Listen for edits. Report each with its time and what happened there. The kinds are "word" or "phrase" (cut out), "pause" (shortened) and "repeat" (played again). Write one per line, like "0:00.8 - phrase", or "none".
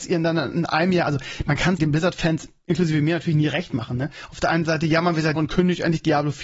0:01.8 - word
0:05.4 - word